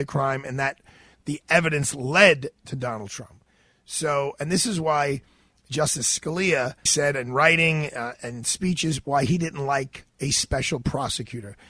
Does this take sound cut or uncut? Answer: cut